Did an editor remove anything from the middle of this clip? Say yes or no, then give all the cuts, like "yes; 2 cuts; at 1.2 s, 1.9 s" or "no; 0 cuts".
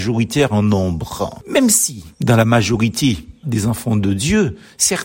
yes; 2 cuts; at 2.1 s, 3.4 s